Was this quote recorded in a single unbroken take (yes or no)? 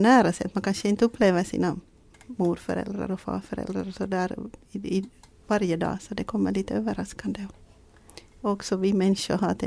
yes